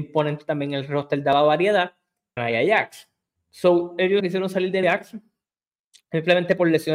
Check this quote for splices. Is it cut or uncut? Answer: cut